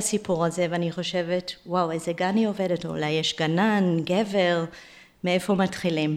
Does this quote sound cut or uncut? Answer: uncut